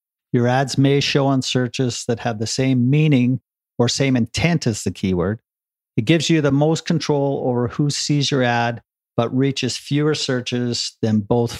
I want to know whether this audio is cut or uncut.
uncut